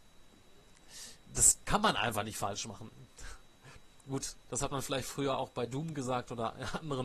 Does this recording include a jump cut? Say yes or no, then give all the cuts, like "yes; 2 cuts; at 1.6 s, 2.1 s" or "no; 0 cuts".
no; 0 cuts